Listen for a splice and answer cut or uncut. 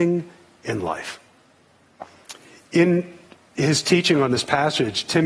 uncut